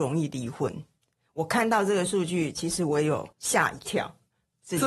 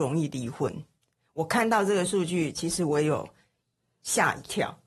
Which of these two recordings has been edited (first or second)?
first